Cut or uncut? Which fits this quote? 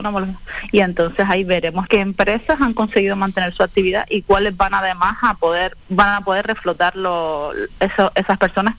cut